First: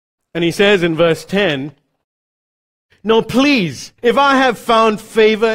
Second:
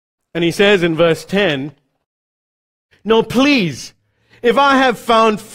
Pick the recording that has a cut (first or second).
first